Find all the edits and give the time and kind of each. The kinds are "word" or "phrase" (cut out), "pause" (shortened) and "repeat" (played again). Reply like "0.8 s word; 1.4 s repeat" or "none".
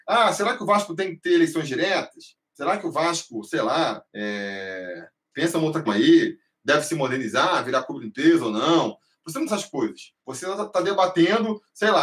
4.1 s pause; 5.9 s word; 9.5 s phrase; 10.2 s pause